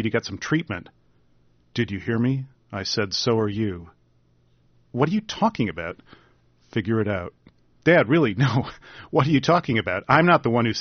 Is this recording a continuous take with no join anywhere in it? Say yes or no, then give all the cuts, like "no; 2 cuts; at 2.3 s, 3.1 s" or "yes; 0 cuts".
yes; 0 cuts